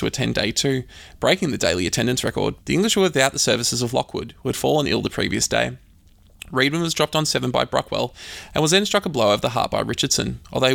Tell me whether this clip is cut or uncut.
cut